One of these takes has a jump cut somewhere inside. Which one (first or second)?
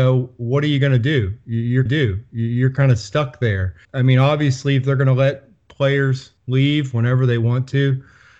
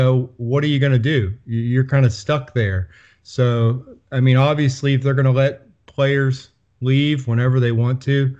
first